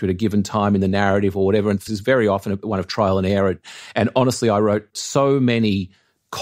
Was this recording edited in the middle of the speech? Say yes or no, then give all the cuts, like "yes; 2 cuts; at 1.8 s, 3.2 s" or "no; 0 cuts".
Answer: yes; 1 cut; at 1.9 s